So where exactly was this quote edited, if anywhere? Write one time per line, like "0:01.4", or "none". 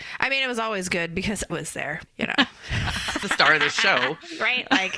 0:01.5
0:02.1
0:03.2